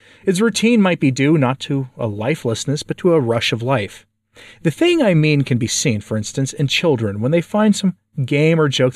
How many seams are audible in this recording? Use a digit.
0